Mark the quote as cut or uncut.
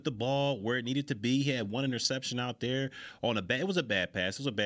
uncut